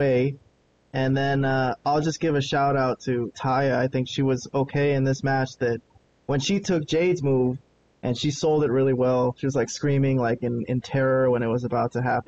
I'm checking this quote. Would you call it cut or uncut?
uncut